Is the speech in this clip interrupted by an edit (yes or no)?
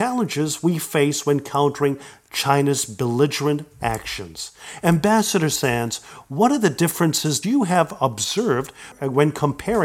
yes